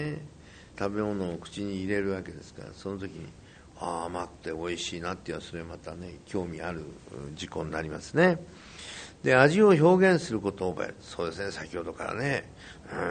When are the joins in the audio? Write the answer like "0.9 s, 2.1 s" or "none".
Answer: none